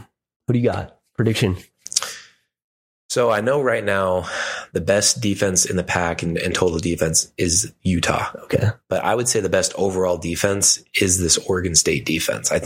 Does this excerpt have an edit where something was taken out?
no; 0 cuts

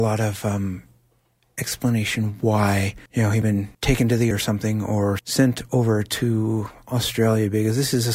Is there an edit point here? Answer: yes; 5 cuts; at 3.1 s, 3.4 s, 3.7 s, 4.3 s, 5.2 s

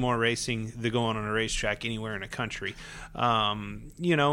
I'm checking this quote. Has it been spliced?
yes; 1 cut; at 1.1 s

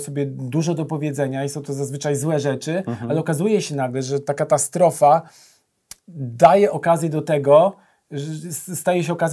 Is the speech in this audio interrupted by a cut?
no; 0 cuts

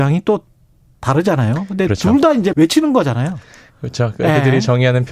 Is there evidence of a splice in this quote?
yes; 1 cut; at 2.5 s

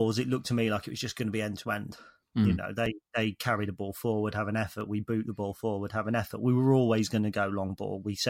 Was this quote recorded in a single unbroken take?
yes; 0 cuts

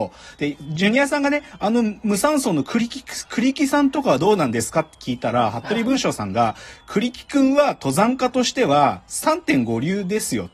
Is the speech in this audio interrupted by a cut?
no; 0 cuts

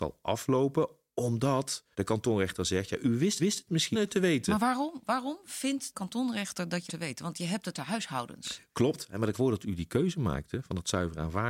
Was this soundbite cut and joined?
yes; 7 cuts; at 1.9 s, 3.4 s, 3.9 s, 5.9 s, 6.9 s, 7.7 s, 9.3 s

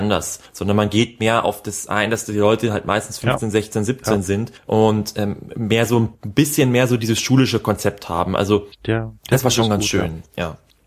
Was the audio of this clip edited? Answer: no; 0 cuts

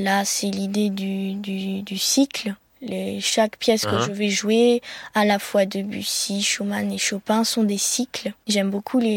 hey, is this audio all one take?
yes; 0 cuts

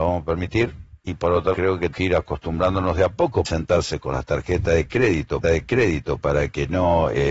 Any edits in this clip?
yes; 5 cuts; at 1.0 s, 1.5 s, 1.9 s, 3.4 s, 5.4 s

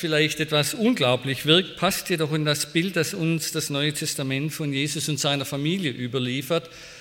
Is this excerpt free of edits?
yes; 0 cuts

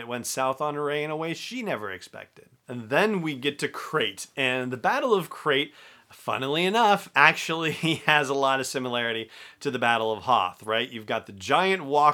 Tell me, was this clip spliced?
no; 0 cuts

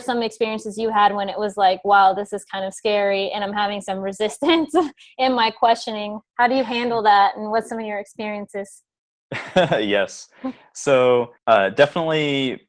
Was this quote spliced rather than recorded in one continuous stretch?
yes; 2 cuts; at 6.3 s, 11.4 s

